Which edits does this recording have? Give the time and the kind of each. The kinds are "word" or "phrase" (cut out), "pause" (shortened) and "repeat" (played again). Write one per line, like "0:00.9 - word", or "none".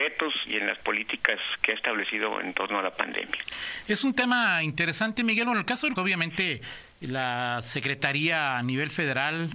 0:06.0 - word